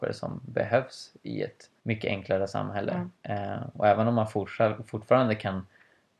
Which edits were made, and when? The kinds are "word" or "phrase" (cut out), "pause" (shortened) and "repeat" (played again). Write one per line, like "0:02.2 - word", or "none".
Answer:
0:01.8 - pause
0:03.1 - pause